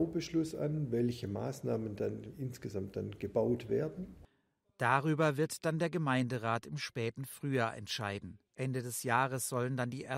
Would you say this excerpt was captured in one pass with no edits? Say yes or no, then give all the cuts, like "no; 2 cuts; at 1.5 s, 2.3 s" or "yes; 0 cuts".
no; 1 cut; at 8.4 s